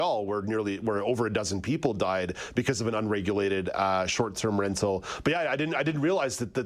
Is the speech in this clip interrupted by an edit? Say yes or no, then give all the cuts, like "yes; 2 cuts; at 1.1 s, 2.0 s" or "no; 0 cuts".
no; 0 cuts